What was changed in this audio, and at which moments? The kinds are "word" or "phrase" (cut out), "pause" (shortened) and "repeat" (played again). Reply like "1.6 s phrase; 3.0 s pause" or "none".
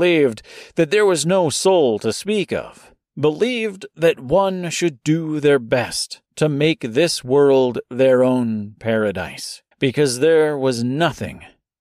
6.3 s pause; 9.7 s pause